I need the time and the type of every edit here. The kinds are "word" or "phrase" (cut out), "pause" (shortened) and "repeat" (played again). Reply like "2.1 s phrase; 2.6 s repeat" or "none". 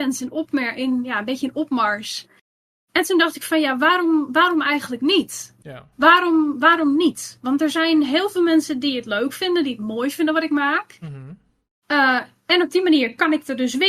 none